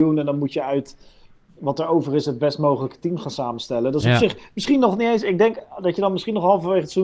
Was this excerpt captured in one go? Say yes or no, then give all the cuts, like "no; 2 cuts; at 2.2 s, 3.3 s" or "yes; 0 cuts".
yes; 0 cuts